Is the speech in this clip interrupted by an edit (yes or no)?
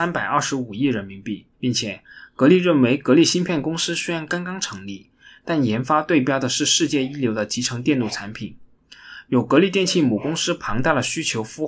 yes